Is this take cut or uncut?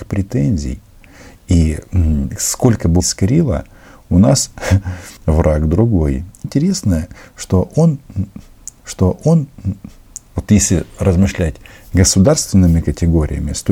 cut